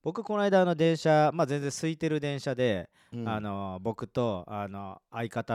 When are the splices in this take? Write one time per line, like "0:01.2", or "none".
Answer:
none